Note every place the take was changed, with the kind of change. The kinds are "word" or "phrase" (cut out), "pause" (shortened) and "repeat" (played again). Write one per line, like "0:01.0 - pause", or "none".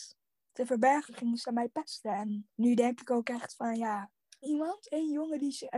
0:02.5 - pause
0:04.4 - phrase